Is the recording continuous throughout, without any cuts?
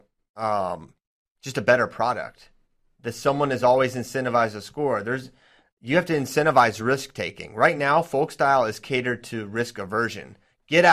yes; 0 cuts

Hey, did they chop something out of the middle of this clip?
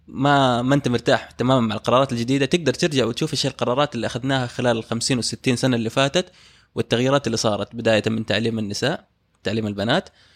no; 0 cuts

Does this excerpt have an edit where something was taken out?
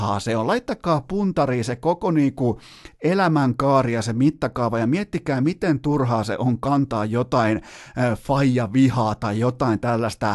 no; 0 cuts

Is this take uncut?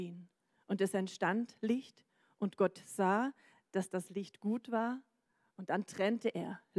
yes; 0 cuts

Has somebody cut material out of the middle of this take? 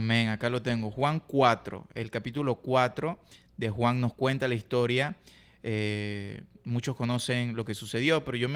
no; 0 cuts

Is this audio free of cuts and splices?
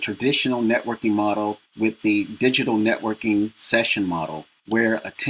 no; 1 cut; at 1.7 s

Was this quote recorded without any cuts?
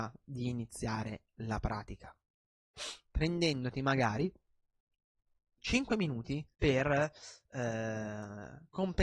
no; 2 cuts; at 5.6 s, 6.5 s

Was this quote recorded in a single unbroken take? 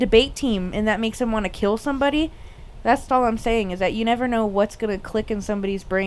no; 1 cut; at 3.1 s

